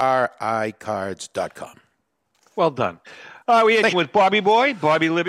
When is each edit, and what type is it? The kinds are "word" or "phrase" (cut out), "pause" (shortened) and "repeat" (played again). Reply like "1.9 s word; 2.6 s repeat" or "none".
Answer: 3.9 s word